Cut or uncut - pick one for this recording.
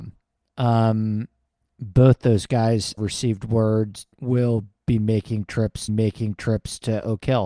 cut